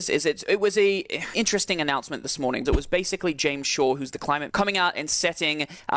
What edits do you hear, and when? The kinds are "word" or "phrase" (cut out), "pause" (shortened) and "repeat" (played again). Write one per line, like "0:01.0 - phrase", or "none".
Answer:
0:01.3 - word
0:02.7 - word
0:04.5 - word